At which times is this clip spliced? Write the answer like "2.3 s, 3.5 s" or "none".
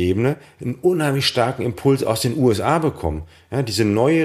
none